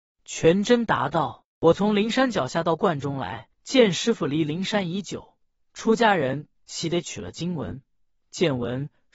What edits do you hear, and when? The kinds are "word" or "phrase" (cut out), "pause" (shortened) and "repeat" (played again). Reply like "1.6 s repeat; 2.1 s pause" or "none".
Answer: 3.5 s pause